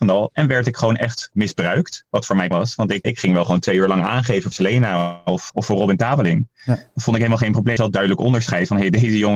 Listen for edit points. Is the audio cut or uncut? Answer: cut